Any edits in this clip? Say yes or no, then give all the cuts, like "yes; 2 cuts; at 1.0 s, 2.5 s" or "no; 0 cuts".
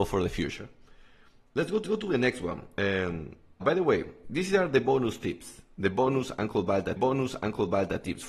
yes; 4 cuts; at 1.8 s, 3.6 s, 4.2 s, 7.0 s